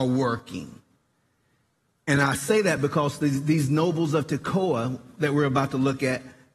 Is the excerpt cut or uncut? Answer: uncut